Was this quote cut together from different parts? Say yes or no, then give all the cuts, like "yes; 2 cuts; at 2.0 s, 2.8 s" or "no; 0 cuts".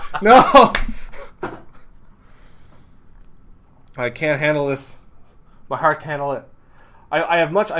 yes; 1 cut; at 6.0 s